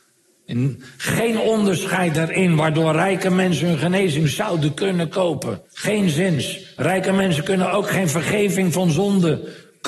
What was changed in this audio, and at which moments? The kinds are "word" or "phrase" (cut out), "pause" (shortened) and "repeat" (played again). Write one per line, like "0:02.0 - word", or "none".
0:05.6 - pause